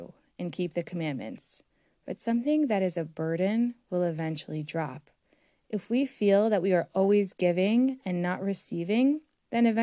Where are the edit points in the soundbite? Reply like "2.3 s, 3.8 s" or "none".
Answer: none